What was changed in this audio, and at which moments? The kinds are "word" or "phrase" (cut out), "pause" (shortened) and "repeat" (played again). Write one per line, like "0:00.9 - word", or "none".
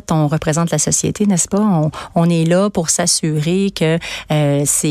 none

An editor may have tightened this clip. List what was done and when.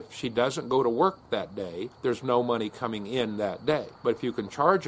0:01.9 - pause
0:03.9 - pause

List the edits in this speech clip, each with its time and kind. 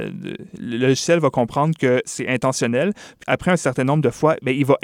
0:03.2 - word

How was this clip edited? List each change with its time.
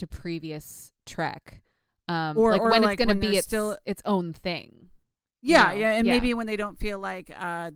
none

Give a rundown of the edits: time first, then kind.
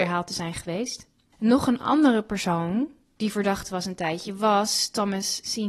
none

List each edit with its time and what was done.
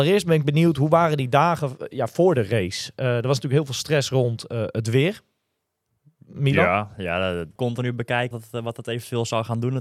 0:07.6 - phrase
0:08.3 - word

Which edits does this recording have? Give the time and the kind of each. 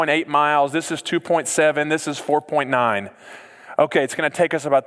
none

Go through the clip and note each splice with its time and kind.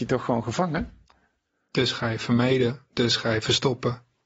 none

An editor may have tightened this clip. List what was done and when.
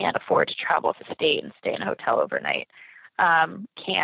0:00.9 - word

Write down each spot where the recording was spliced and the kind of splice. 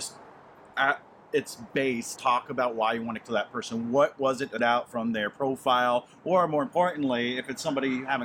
0:02.2 - word
0:03.2 - word
0:04.6 - word

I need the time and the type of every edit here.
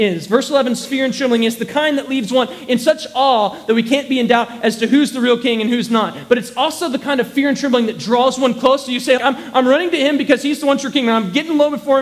0:09.2 - word

